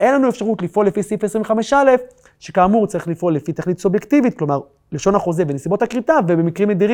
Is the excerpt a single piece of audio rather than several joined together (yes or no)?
yes